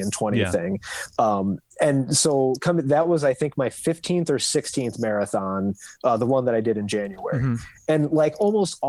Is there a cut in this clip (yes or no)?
no